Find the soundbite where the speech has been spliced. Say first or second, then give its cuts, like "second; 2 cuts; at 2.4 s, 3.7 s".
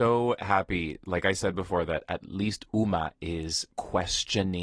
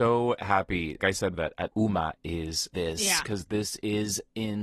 second; 4 cuts; at 1.0 s, 1.3 s, 1.7 s, 2.7 s